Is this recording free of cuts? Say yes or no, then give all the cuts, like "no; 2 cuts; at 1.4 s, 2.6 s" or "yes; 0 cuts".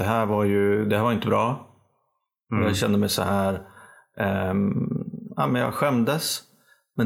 yes; 0 cuts